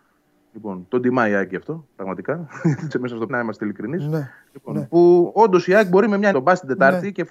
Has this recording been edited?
yes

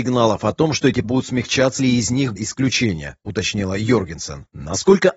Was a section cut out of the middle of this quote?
yes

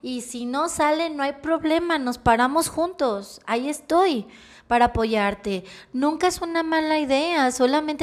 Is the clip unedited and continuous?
yes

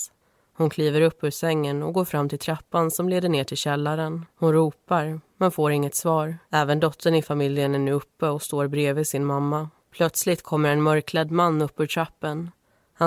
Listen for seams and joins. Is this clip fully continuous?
no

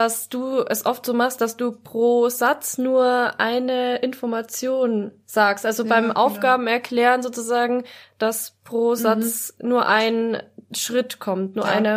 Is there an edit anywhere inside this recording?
no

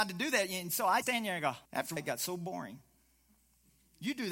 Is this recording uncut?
no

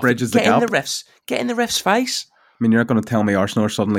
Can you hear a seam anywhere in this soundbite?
no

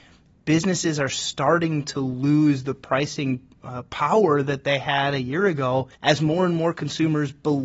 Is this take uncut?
no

